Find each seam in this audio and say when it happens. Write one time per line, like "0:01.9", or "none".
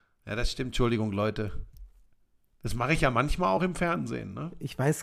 none